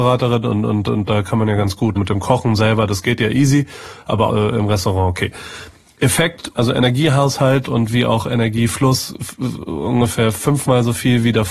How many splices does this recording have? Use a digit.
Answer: 4